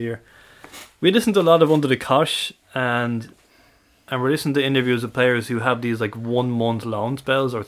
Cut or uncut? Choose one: uncut